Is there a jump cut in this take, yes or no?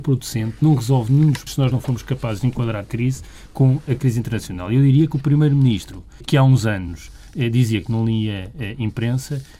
yes